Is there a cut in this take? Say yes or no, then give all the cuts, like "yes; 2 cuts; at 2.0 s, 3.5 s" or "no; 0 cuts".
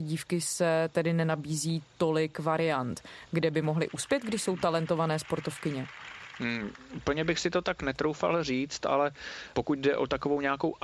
no; 0 cuts